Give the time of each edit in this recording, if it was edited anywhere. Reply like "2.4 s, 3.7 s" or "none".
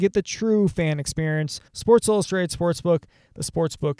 1.7 s